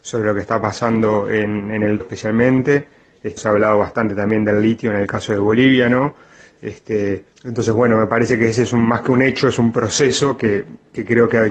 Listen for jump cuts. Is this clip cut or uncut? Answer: cut